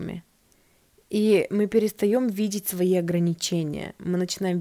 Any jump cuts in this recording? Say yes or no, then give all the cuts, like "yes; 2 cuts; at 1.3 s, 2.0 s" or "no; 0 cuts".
no; 0 cuts